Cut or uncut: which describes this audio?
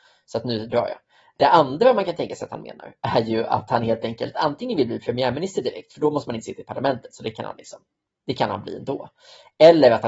uncut